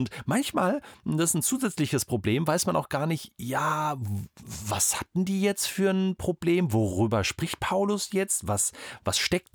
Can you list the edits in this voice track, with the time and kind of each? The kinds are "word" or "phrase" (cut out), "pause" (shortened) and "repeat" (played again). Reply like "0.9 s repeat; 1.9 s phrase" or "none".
none

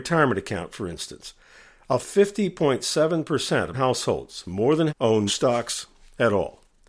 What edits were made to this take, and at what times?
2.0 s word; 3.7 s word; 4.9 s word; 5.3 s word

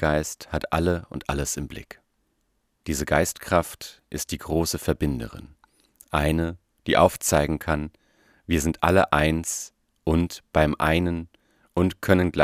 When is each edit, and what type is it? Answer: none

